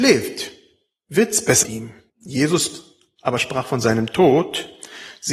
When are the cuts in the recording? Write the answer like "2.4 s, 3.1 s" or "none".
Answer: 1.6 s, 2.1 s